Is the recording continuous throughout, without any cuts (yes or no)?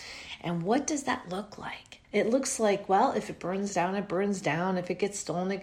no